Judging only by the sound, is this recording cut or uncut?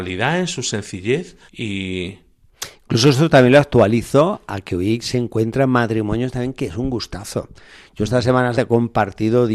cut